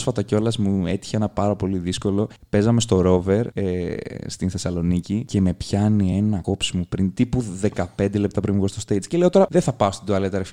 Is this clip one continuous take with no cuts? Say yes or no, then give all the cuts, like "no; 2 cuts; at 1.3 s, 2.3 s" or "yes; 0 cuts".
yes; 0 cuts